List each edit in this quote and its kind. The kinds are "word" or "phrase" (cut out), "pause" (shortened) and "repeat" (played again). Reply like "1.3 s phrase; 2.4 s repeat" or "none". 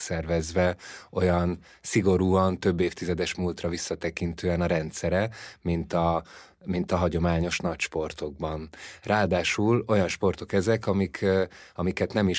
none